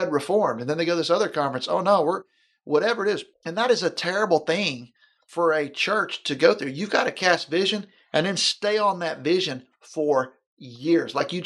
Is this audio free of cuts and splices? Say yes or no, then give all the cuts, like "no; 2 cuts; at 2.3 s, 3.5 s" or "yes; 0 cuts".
no; 1 cut; at 3.3 s